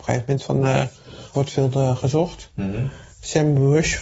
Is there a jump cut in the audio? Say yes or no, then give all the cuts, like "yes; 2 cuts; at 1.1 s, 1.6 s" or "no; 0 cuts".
yes; 1 cut; at 1.3 s